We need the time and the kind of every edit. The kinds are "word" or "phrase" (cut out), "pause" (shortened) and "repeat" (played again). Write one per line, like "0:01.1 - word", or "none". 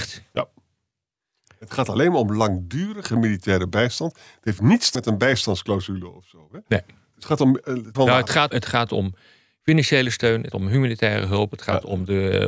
0:04.9 - word
0:07.9 - word
0:08.5 - word
0:10.5 - word